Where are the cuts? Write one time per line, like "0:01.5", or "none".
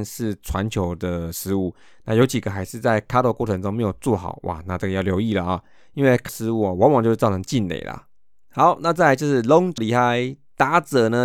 0:06.3
0:09.8